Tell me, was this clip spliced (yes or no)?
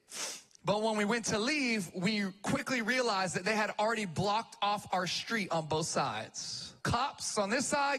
yes